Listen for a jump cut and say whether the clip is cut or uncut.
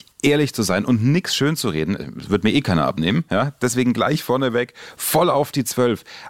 uncut